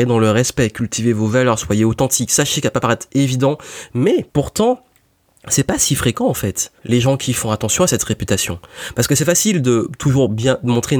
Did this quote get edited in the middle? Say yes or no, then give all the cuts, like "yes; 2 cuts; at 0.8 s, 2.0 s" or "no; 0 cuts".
yes; 2 cuts; at 4.3 s, 6.8 s